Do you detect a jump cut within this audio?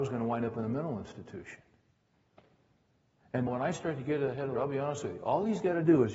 yes; 2 cuts; at 3.5 s, 4.5 s

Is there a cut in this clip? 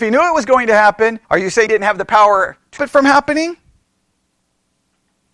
yes; 3 cuts; at 1.2 s, 1.7 s, 2.8 s

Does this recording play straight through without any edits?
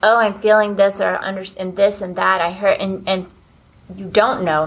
no; 1 cut; at 1.2 s

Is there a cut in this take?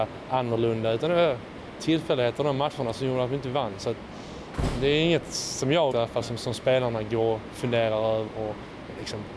yes; 3 cuts; at 2.9 s, 5.9 s, 8.3 s

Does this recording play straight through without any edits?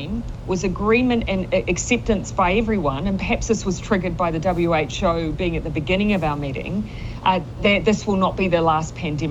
yes; 0 cuts

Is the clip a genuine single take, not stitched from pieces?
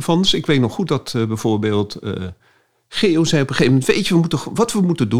yes; 0 cuts

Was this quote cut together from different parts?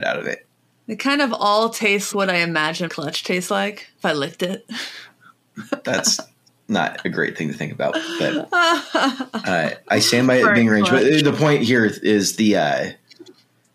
yes; 3 cuts; at 2.1 s, 2.9 s, 3.9 s

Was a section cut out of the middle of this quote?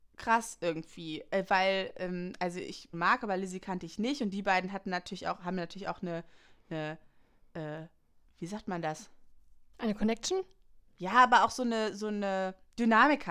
yes; 2 cuts; at 2.9 s, 8.2 s

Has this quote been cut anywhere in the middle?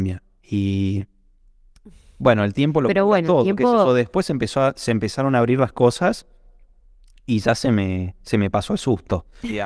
no; 0 cuts

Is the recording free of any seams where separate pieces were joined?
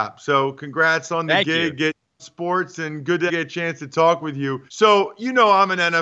no; 3 cuts; at 2.2 s, 3.3 s, 4.7 s

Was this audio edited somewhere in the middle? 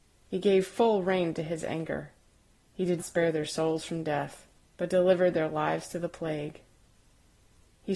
yes; 2 cuts; at 3.0 s, 4.5 s

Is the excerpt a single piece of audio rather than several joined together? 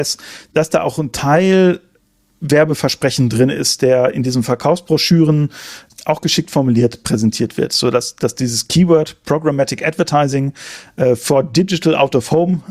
yes; 0 cuts

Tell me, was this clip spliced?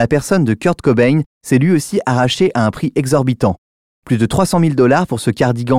no; 0 cuts

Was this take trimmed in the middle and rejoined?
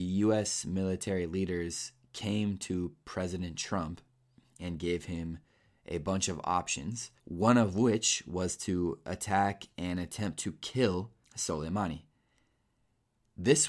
yes; 2 cuts; at 7.2 s, 11.2 s

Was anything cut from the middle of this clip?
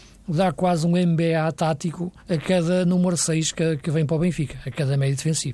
yes; 1 cut; at 2.2 s

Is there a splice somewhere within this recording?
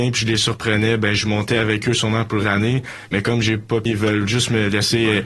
yes; 2 cuts; at 2.4 s, 3.9 s

